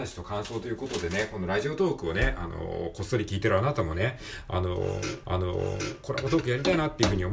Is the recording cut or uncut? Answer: cut